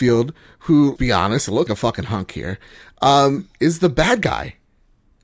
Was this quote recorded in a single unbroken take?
no; 2 cuts; at 1.0 s, 1.7 s

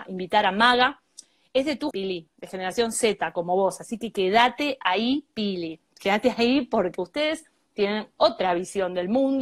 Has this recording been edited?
yes; 1 cut; at 1.9 s

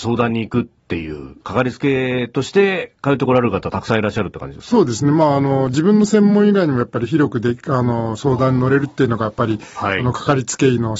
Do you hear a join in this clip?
yes; 1 cut; at 1.4 s

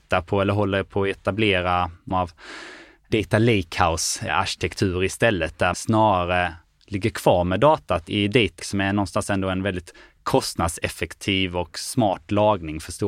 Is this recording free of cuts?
no; 3 cuts; at 2.1 s, 5.7 s, 8.6 s

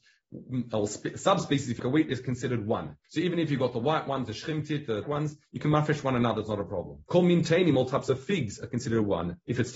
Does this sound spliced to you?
yes; 4 cuts; at 1.8 s, 3.0 s, 5.0 s, 7.1 s

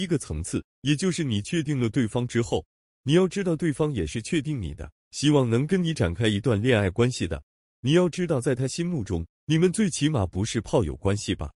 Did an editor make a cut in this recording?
no; 0 cuts

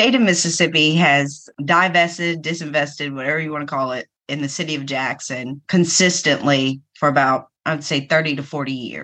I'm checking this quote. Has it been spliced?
yes; 4 cuts; at 1.5 s, 4.2 s, 5.6 s, 7.6 s

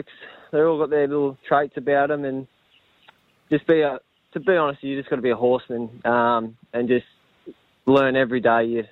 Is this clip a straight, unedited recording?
yes; 0 cuts

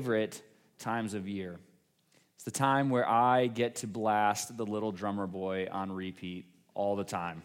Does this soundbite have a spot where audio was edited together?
no; 0 cuts

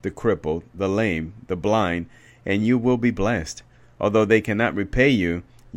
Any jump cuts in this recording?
no; 0 cuts

